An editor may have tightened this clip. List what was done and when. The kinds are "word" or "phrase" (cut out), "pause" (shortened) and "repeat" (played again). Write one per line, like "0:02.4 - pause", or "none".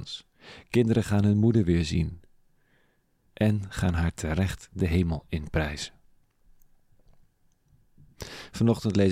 none